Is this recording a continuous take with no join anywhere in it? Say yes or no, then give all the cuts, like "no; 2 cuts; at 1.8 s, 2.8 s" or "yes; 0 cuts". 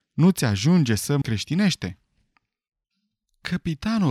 no; 1 cut; at 1.2 s